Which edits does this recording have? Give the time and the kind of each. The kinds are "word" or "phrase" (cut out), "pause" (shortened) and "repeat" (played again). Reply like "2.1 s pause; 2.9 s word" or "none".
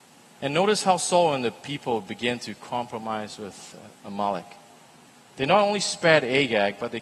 none